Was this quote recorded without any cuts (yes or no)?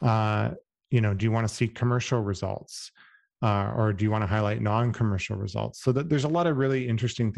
yes